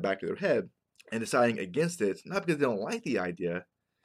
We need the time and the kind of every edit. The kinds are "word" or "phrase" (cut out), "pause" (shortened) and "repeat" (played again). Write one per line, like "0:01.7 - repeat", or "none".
0:00.9 - pause